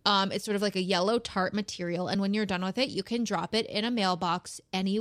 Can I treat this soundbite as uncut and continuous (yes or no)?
yes